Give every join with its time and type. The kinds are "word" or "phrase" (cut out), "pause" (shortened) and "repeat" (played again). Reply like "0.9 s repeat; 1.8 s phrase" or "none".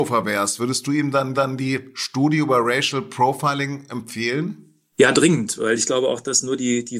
1.3 s repeat